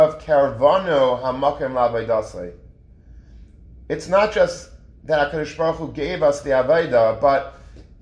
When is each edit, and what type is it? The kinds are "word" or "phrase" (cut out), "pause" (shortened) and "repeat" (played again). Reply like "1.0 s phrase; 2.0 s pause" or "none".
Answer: none